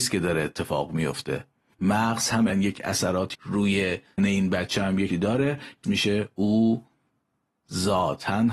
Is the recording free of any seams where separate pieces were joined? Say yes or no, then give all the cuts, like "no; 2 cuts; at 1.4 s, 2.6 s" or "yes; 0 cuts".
no; 6 cuts; at 1.7 s, 2.5 s, 3.3 s, 4.2 s, 5.1 s, 5.8 s